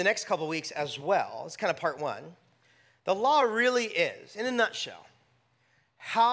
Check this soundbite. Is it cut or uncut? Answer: uncut